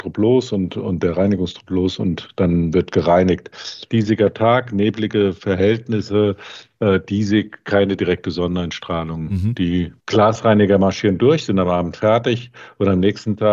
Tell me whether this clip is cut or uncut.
cut